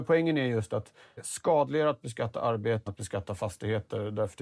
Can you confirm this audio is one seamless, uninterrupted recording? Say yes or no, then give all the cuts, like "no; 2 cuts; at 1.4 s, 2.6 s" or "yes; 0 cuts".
no; 2 cuts; at 1.2 s, 2.9 s